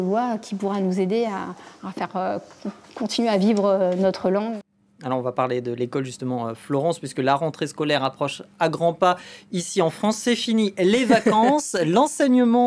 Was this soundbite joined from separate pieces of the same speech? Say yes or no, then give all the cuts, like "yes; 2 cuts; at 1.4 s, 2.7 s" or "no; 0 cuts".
no; 0 cuts